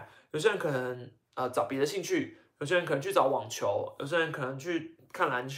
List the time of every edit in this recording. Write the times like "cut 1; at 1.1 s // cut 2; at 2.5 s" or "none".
none